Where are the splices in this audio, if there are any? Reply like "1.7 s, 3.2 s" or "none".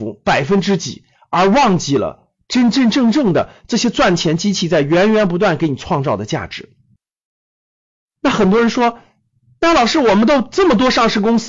none